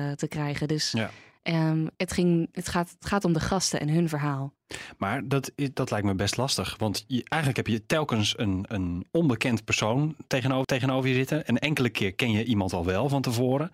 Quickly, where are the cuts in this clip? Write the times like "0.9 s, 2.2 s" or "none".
1.9 s, 10.6 s